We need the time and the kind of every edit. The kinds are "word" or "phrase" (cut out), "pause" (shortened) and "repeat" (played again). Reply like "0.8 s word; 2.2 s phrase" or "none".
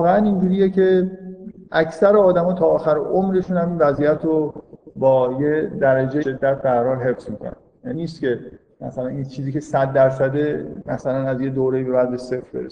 6.2 s word; 7.9 s word